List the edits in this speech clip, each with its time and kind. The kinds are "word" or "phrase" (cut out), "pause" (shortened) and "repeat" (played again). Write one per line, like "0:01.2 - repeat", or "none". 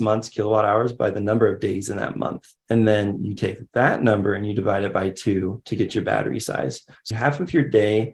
0:02.6 - pause
0:07.1 - word